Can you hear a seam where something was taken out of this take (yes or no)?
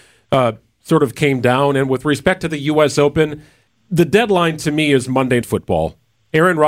yes